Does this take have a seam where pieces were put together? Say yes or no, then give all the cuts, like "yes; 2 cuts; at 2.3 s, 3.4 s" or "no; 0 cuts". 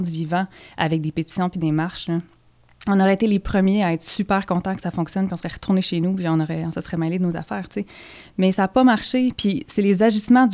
no; 0 cuts